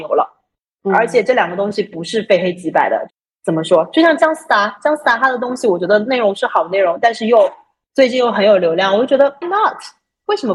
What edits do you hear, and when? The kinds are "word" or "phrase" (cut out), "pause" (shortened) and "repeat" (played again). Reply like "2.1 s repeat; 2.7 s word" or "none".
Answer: 9.4 s word